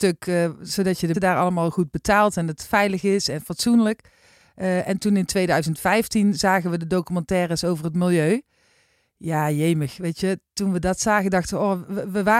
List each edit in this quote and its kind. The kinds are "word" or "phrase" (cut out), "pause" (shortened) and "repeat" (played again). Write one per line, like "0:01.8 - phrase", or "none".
0:01.1 - word